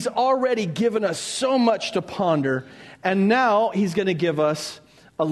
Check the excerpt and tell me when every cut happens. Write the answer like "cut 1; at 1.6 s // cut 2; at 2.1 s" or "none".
none